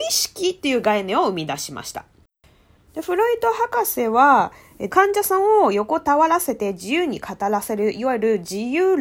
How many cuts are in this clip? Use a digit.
1